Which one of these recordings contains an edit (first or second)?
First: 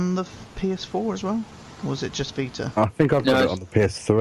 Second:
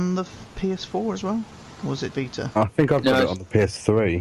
second